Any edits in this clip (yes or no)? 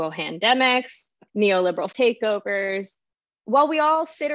yes